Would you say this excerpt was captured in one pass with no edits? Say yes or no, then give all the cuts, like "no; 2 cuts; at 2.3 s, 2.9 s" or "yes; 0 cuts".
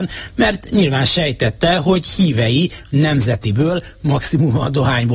yes; 0 cuts